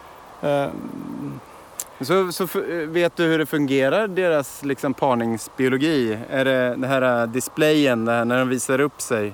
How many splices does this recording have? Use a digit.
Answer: 0